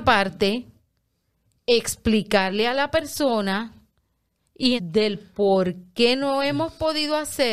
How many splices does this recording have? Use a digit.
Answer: 1